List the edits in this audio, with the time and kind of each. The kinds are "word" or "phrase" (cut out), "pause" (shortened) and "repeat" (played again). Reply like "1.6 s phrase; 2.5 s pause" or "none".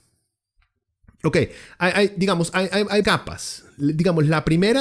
3.0 s word